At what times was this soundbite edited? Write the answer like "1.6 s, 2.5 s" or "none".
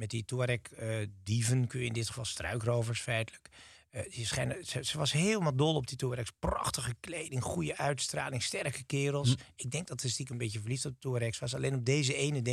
none